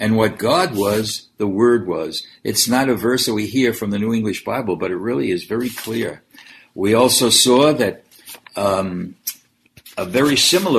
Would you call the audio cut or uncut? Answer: uncut